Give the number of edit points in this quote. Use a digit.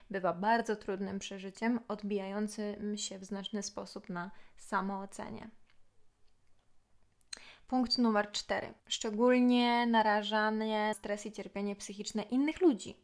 2